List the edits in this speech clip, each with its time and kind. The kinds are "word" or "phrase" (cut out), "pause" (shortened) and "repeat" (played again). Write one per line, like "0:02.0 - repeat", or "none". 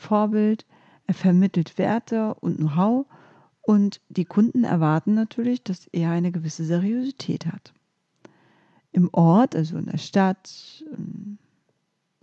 none